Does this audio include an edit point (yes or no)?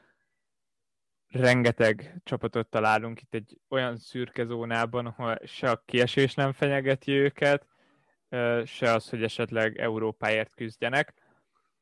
no